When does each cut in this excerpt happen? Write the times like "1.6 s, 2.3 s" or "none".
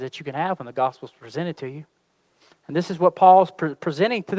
none